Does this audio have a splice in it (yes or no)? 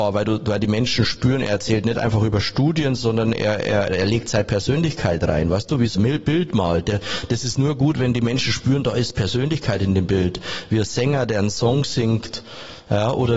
yes